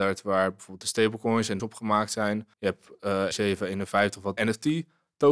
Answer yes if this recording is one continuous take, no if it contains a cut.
no